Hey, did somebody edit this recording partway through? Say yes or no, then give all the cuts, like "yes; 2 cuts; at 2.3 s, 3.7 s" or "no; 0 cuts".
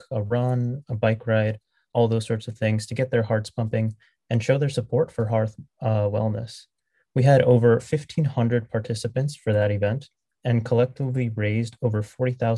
no; 0 cuts